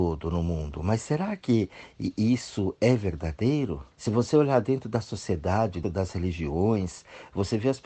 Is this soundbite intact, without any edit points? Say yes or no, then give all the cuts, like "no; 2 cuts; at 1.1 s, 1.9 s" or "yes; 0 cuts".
no; 2 cuts; at 3.9 s, 5.8 s